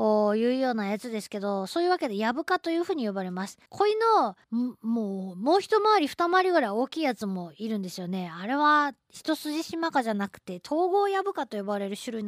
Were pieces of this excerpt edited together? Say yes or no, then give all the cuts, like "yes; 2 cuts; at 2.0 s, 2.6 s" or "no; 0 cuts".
yes; 2 cuts; at 3.7 s, 4.4 s